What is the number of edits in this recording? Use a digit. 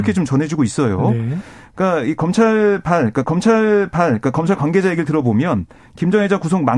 1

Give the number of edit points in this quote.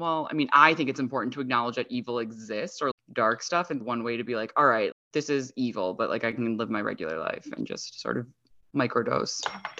3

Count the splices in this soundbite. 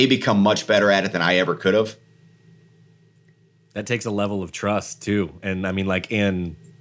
0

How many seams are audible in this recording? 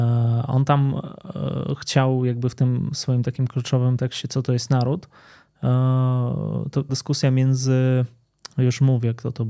1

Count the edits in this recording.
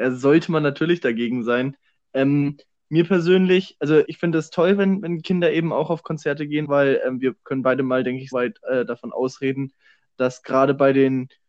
3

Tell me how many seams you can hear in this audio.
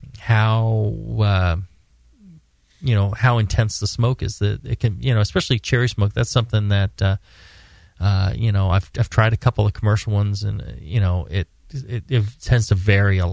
0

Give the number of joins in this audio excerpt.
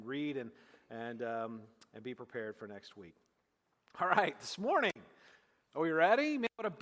0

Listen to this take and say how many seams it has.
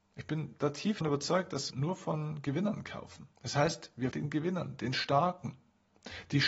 4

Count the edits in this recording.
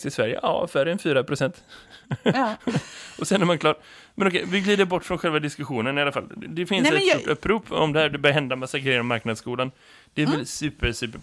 0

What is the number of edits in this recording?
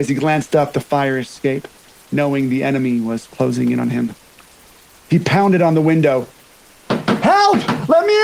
0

